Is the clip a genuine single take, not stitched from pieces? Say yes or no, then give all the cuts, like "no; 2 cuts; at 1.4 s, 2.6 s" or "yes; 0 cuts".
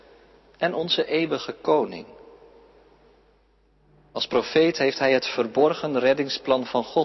yes; 0 cuts